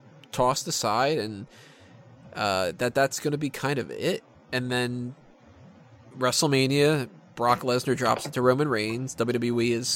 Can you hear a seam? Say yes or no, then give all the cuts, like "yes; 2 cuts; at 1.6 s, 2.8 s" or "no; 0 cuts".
no; 0 cuts